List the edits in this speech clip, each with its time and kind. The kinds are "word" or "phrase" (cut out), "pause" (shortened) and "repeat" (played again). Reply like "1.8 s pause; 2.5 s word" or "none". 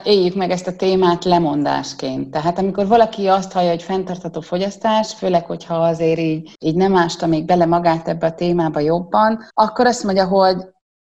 6.6 s pause; 9.5 s pause